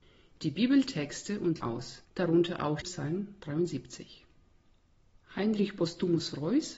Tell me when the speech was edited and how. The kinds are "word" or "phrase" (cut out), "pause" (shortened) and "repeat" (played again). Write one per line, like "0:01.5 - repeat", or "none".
0:01.6 - phrase
0:02.0 - pause
0:02.8 - phrase